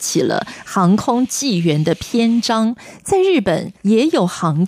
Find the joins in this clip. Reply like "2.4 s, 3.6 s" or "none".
3.8 s